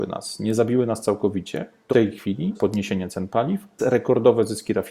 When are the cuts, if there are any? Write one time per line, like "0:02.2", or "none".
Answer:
0:01.9
0:02.5
0:03.8

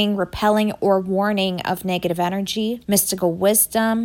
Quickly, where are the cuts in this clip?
0:02.8

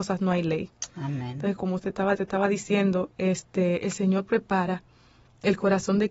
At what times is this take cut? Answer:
0:01.6
0:02.1

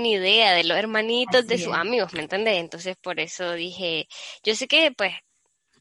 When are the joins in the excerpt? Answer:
none

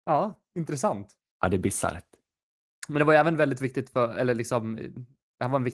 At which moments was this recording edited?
none

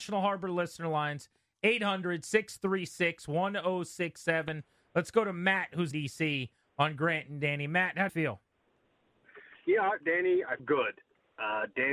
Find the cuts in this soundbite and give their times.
0:05.9
0:08.1
0:10.0
0:10.6

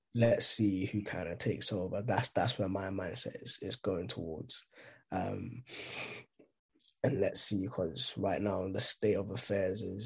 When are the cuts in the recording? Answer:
none

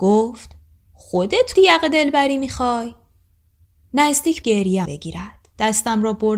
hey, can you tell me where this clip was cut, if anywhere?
0:01.5
0:04.4
0:04.9

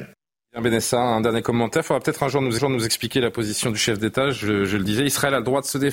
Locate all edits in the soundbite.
0:02.6

